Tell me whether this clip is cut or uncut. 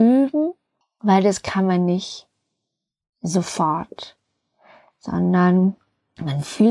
uncut